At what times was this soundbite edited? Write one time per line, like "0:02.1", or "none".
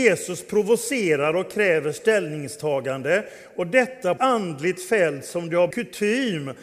0:04.2
0:05.7